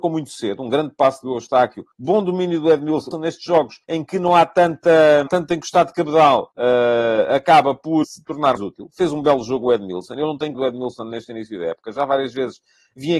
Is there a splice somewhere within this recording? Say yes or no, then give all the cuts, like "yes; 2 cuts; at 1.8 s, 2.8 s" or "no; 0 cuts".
yes; 8 cuts; at 1.9 s, 3.1 s, 3.8 s, 5.3 s, 6.5 s, 8.0 s, 8.6 s, 10.5 s